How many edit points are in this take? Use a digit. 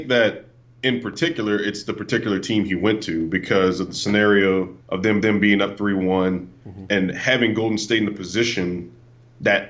2